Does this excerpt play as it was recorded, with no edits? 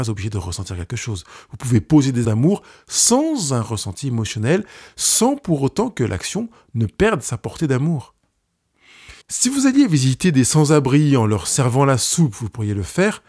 no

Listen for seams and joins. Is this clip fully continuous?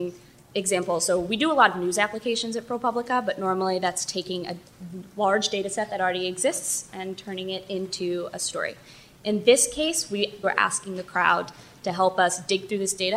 no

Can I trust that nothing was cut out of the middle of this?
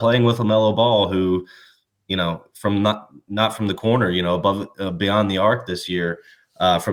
yes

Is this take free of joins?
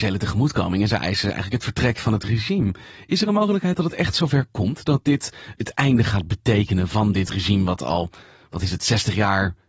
yes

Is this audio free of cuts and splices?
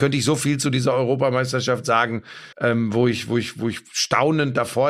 no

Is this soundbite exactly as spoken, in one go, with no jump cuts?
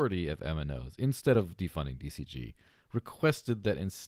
yes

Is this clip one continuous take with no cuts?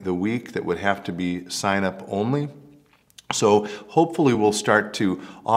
yes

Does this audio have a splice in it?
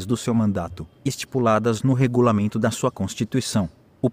no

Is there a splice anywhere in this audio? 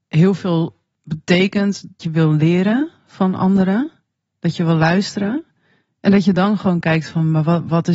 yes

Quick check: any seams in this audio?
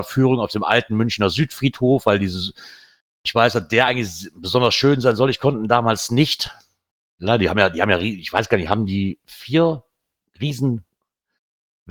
no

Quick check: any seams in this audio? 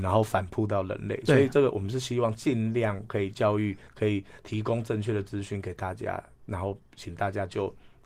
yes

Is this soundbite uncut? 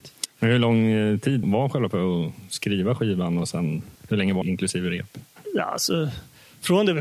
no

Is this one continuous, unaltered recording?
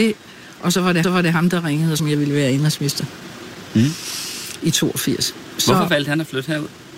no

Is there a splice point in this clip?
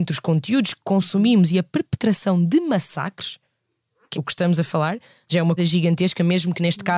yes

